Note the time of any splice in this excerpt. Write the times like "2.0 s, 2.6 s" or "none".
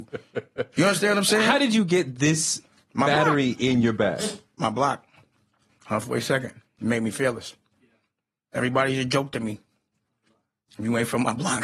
none